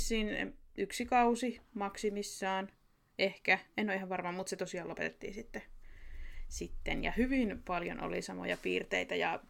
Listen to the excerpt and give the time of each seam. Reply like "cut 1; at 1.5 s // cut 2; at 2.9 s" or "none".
none